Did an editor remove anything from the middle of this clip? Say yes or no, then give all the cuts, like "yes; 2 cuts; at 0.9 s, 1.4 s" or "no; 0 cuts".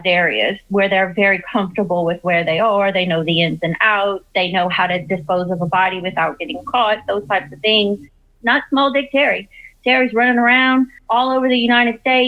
no; 0 cuts